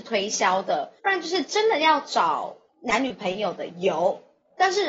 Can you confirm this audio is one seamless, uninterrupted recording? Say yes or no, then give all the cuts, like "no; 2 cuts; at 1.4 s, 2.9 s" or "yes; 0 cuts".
no; 1 cut; at 1.0 s